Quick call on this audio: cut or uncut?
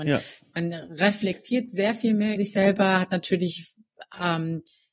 cut